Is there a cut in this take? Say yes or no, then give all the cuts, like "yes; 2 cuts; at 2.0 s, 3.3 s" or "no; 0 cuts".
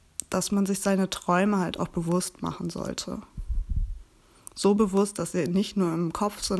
no; 0 cuts